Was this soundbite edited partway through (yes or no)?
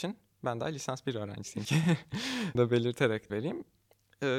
yes